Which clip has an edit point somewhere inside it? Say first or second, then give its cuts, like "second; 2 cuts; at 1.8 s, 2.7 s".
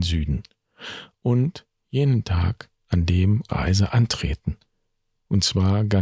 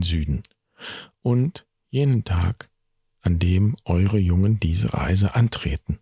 first; 2 cuts; at 2.8 s, 3.5 s